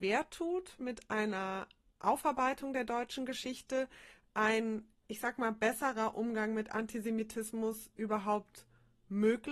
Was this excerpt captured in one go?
yes; 0 cuts

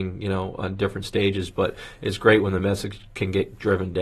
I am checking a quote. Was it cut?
no; 0 cuts

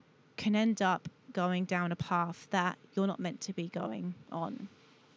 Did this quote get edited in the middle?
no; 0 cuts

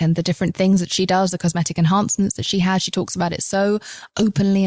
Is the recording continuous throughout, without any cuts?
yes; 0 cuts

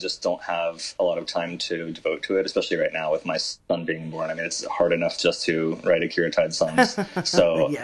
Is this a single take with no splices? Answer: yes; 0 cuts

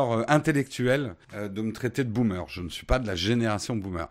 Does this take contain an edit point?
yes; 1 cut; at 1.2 s

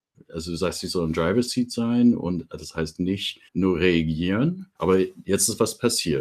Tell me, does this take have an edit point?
yes; 2 cuts; at 3.5 s, 4.8 s

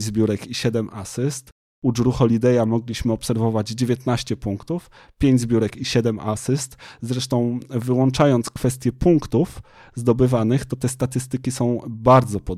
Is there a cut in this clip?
no; 0 cuts

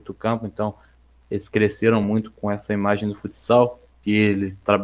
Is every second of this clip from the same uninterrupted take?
yes; 0 cuts

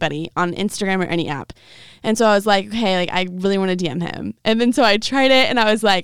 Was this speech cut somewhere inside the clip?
no; 0 cuts

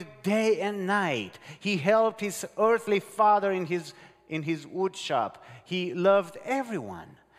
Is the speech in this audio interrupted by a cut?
no; 0 cuts

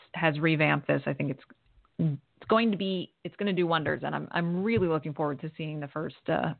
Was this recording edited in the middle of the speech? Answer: no; 0 cuts

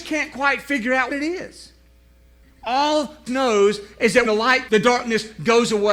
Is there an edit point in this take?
yes; 4 cuts; at 1.1 s, 3.3 s, 4.3 s, 4.7 s

